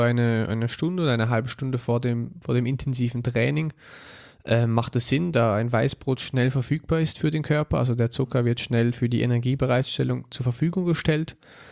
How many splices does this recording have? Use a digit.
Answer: 0